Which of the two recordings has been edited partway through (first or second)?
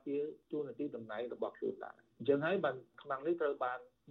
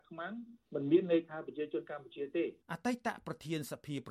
second